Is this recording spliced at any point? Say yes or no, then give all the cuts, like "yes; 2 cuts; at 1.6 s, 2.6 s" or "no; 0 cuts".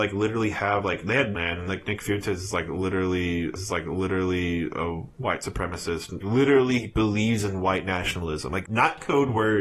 yes; 4 cuts; at 1.3 s, 3.6 s, 6.2 s, 8.6 s